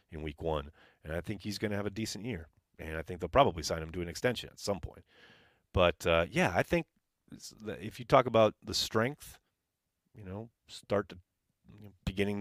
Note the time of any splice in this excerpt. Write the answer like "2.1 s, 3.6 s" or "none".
none